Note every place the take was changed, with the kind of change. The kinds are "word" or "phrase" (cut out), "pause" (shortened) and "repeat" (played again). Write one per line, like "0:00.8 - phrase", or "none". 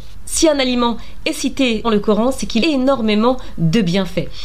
0:01.8 - word
0:02.6 - word